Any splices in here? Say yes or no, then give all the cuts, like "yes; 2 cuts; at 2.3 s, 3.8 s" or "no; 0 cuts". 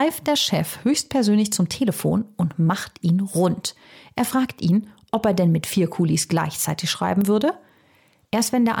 no; 0 cuts